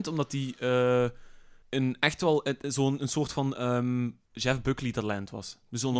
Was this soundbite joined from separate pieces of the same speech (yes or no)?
yes